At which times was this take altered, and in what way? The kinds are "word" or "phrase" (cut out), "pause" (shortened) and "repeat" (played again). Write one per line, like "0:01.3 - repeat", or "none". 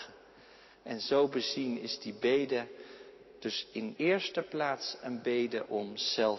0:04.0 - word